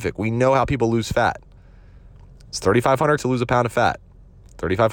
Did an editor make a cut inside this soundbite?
yes; 1 cut; at 3.2 s

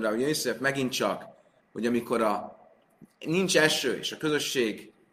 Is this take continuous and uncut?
yes; 0 cuts

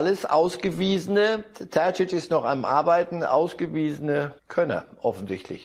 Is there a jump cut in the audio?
yes; 1 cut; at 4.4 s

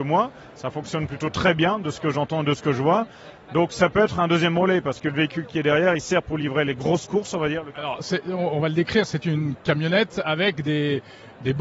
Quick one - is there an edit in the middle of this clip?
no; 0 cuts

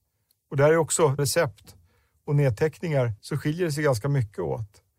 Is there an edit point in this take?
yes; 2 cuts; at 1.2 s, 3.2 s

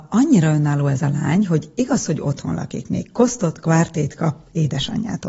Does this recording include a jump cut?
no; 0 cuts

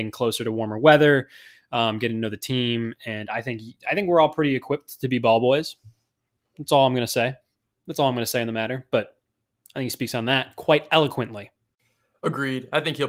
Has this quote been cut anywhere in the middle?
no; 0 cuts

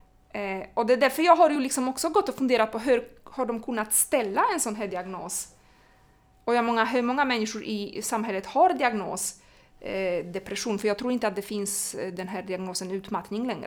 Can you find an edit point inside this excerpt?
no; 0 cuts

